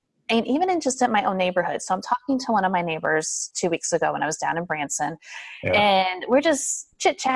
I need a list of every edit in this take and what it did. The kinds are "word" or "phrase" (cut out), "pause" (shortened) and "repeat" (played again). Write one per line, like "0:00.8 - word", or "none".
none